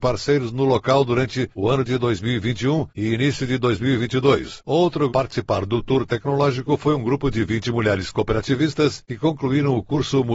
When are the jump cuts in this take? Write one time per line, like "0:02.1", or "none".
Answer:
0:01.5
0:02.9
0:05.1